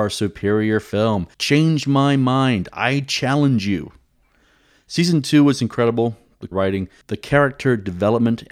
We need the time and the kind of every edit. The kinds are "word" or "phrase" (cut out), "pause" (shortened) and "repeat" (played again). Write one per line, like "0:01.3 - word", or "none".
0:01.3 - pause
0:06.5 - phrase